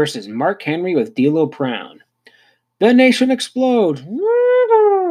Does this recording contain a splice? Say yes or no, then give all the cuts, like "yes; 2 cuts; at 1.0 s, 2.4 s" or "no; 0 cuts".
no; 0 cuts